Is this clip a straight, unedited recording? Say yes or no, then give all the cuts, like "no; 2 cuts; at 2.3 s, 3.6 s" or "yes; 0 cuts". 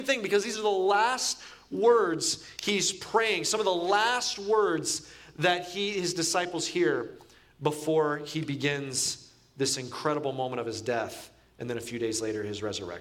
yes; 0 cuts